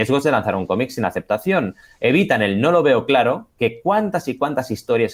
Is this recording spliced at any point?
no; 0 cuts

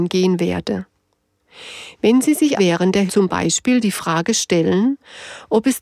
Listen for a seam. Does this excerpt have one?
yes; 2 cuts; at 2.6 s, 3.1 s

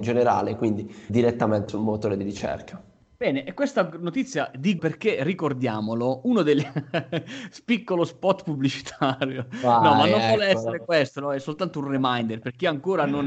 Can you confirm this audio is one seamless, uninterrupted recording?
no; 3 cuts; at 1.1 s, 1.7 s, 4.8 s

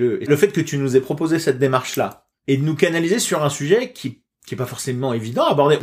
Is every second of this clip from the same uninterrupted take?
yes; 0 cuts

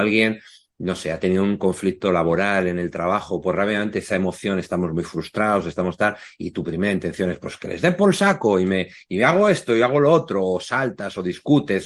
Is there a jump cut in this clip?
no; 0 cuts

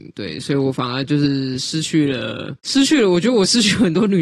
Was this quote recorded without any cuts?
no; 1 cut; at 2.6 s

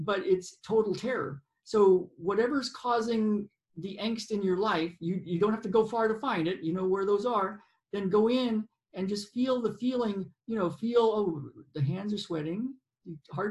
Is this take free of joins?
yes; 0 cuts

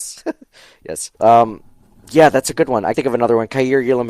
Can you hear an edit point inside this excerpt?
yes; 2 cuts; at 1.1 s, 2.9 s

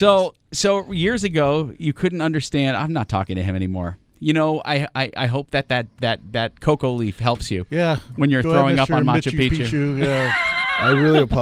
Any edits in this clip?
no; 0 cuts

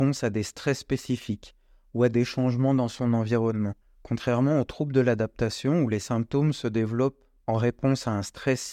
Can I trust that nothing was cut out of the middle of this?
no; 1 cut; at 3.8 s

